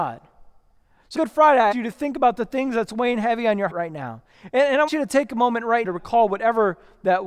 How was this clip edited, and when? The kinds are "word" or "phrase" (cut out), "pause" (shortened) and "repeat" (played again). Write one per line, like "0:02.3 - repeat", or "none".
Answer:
0:01.1 - word
0:01.7 - word
0:03.7 - word
0:04.9 - word
0:05.8 - word